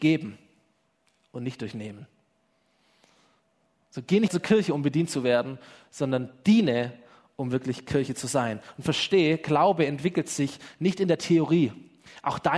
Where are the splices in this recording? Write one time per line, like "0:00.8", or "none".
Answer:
0:04.3